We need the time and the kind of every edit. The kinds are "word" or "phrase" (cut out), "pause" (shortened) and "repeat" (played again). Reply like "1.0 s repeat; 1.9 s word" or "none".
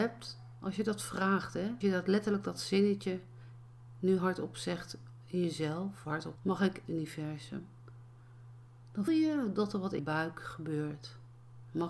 1.8 s word; 6.0 s word; 6.4 s word; 6.9 s word; 9.1 s word; 10.0 s word